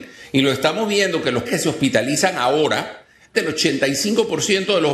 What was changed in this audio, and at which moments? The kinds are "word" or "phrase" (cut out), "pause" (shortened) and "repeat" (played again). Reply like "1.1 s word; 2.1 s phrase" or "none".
1.4 s word; 3.3 s word